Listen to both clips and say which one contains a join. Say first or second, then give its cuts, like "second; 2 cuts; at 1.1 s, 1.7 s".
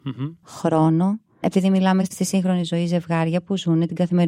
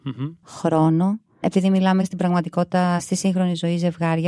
first; 1 cut; at 2.1 s